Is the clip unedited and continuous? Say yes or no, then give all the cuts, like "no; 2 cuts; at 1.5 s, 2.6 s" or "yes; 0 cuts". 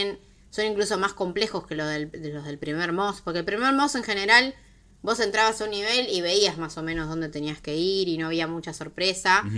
yes; 0 cuts